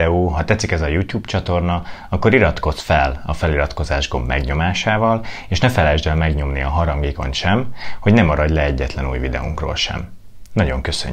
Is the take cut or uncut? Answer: uncut